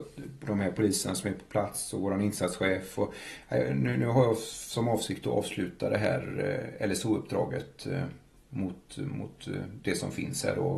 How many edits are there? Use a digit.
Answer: 0